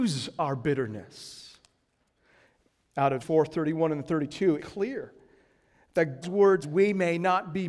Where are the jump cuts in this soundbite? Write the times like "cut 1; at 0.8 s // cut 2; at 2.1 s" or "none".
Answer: cut 1; at 3.2 s // cut 2; at 4.6 s // cut 3; at 6.2 s // cut 4; at 6.6 s